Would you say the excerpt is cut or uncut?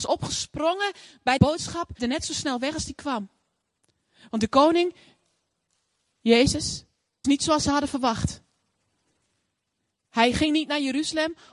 cut